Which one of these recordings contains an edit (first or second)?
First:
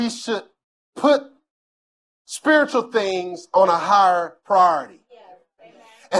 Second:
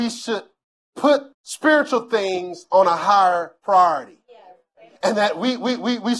second